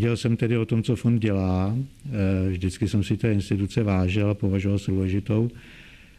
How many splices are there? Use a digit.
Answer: 1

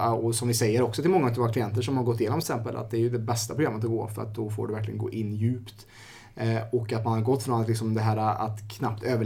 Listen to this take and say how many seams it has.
1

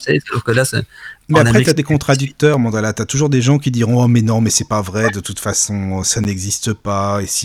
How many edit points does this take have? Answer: 1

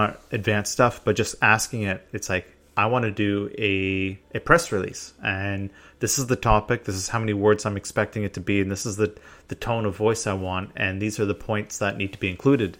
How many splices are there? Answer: 1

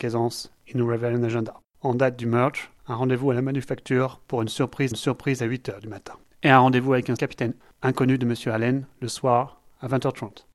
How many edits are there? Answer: 6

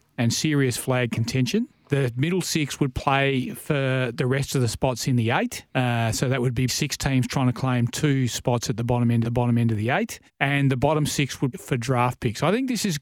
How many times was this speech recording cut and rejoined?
6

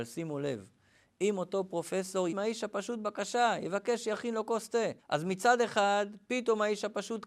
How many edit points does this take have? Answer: 2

